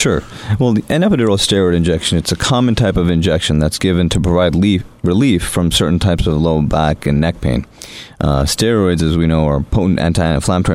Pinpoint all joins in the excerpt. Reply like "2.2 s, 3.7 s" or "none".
none

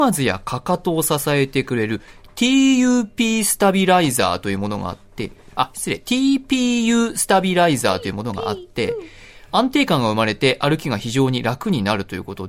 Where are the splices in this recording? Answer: none

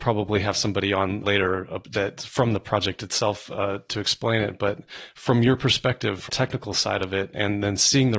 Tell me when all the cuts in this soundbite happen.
1.2 s, 6.3 s

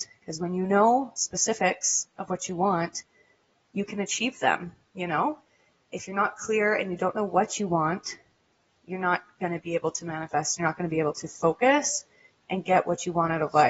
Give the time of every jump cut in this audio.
none

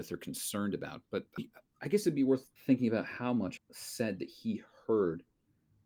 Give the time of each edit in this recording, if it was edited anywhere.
1.4 s, 2.6 s, 3.6 s

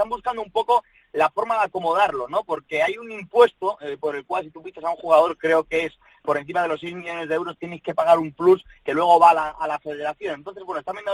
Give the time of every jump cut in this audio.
none

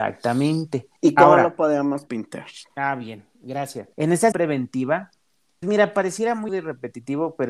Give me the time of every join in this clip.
1.0 s, 2.1 s, 2.7 s, 3.9 s, 4.3 s, 5.6 s, 6.5 s

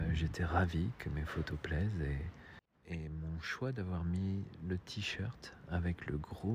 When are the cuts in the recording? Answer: 2.7 s

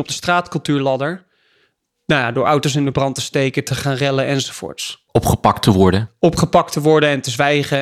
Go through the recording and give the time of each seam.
none

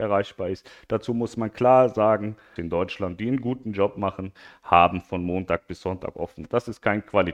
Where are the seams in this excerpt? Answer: 2.6 s

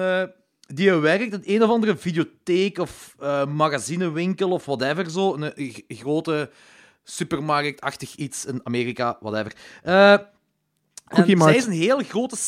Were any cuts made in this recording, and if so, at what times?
none

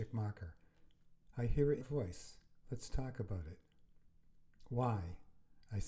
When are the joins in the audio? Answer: 1.8 s, 2.6 s

